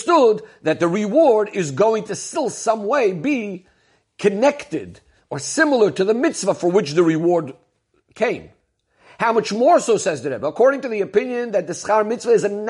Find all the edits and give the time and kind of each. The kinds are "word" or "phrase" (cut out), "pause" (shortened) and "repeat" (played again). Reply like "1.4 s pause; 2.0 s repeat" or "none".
none